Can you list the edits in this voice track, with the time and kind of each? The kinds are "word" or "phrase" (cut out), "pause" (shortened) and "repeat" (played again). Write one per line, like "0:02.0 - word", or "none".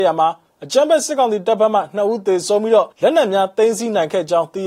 0:02.9 - pause